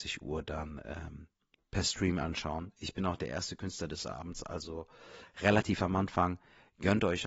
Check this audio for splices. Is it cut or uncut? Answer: uncut